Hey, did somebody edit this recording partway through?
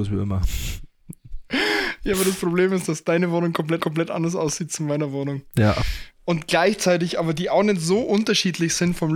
yes; 1 cut; at 3.8 s

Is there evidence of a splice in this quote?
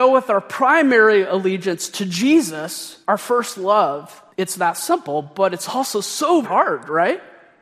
yes; 3 cuts; at 3.0 s, 4.3 s, 6.4 s

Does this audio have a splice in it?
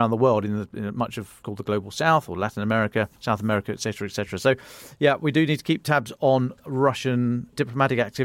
yes; 2 cuts; at 1.4 s, 3.1 s

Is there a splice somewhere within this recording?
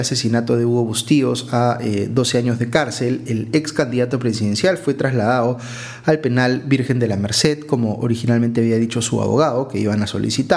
no; 0 cuts

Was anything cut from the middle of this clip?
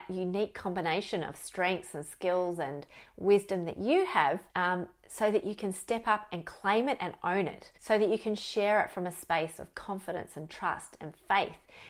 yes; 2 cuts; at 4.5 s, 7.7 s

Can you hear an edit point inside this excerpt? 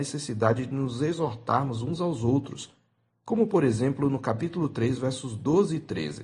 no; 0 cuts

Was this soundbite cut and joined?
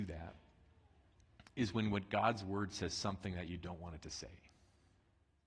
no; 0 cuts

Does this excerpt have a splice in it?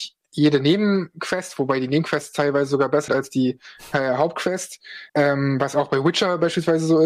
yes; 2 cuts; at 3.1 s, 5.1 s

